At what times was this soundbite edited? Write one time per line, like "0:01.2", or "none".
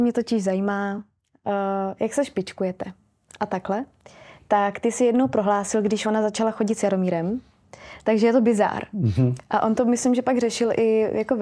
none